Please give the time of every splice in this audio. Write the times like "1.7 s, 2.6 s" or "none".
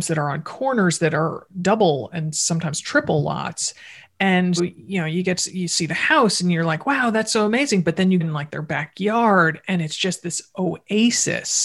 4.6 s, 8.2 s